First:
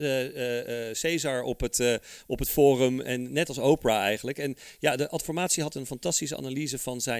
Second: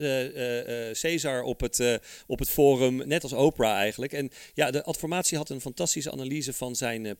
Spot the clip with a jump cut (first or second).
second